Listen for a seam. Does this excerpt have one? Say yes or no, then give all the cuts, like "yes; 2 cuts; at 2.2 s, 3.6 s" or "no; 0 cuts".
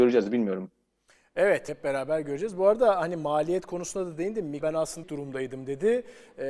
yes; 3 cuts; at 1.7 s, 4.6 s, 5.0 s